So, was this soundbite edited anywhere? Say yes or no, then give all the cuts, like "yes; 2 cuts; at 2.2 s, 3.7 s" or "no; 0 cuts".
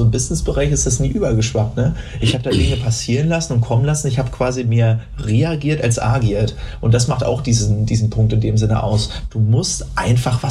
no; 0 cuts